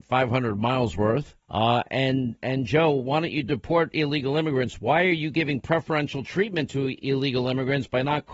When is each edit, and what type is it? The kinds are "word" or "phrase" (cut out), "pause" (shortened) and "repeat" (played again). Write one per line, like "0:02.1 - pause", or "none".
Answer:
0:01.4 - pause